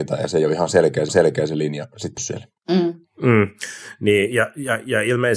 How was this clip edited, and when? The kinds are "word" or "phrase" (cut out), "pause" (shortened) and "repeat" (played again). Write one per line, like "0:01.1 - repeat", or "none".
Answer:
0:01.1 - repeat
0:02.2 - word